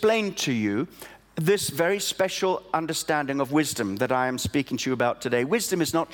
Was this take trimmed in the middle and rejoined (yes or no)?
no